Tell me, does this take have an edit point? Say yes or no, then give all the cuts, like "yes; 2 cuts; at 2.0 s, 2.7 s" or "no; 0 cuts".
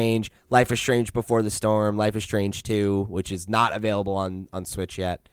no; 0 cuts